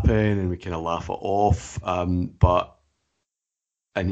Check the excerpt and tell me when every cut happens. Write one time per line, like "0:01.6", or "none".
none